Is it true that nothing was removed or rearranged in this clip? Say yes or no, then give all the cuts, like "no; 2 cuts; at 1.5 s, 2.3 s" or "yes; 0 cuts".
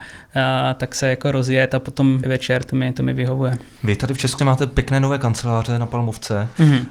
no; 2 cuts; at 2.2 s, 4.4 s